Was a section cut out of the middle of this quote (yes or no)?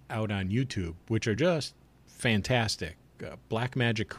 no